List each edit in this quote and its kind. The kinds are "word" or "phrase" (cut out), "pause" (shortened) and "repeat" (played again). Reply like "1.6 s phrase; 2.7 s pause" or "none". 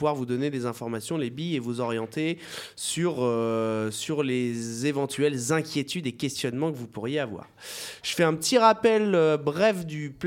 none